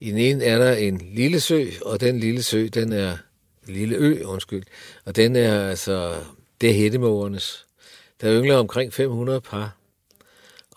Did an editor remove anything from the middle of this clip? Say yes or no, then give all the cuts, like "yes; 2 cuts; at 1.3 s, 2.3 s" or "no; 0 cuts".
no; 0 cuts